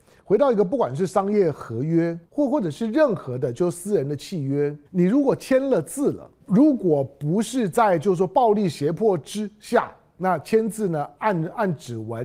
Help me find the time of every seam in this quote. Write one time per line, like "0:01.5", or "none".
0:02.2
0:04.9
0:06.4